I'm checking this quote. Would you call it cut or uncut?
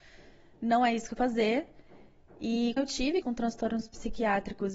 cut